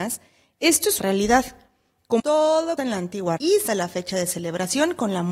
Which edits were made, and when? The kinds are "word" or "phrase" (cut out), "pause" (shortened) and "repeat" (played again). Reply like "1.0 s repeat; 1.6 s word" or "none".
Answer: 1.0 s word; 2.2 s word; 2.8 s word; 3.4 s word; 3.7 s word